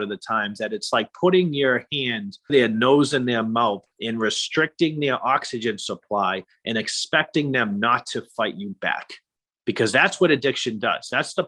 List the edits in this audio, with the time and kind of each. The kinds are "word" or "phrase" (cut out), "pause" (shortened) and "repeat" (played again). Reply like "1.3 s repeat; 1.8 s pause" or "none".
2.5 s word; 3.9 s pause